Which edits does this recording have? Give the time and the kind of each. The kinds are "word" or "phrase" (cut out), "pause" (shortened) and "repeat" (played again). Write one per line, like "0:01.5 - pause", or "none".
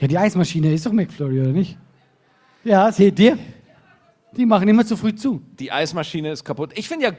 none